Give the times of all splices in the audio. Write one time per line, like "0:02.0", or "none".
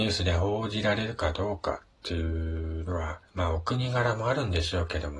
0:01.9
0:03.2